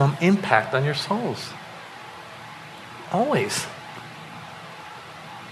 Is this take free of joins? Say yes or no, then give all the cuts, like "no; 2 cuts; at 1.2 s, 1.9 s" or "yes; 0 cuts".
yes; 0 cuts